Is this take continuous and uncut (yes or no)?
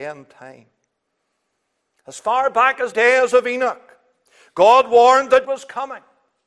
no